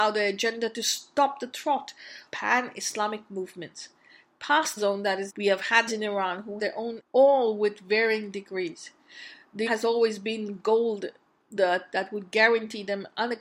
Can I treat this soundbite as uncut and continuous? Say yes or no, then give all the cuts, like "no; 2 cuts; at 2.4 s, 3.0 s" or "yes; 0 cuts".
no; 8 cuts; at 2.3 s, 4.8 s, 5.3 s, 5.9 s, 6.6 s, 7.0 s, 9.7 s, 11.6 s